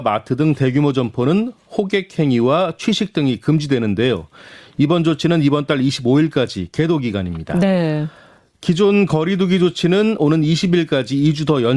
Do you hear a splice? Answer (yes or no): no